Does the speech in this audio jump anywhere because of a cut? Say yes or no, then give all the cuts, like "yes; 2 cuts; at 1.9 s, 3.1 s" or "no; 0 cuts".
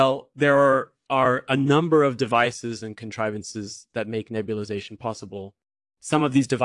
no; 0 cuts